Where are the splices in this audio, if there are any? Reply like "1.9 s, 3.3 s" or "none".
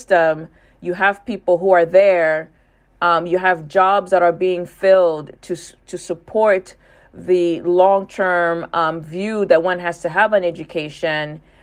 none